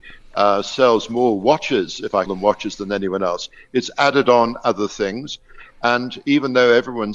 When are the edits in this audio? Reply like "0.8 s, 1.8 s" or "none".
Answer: 2.3 s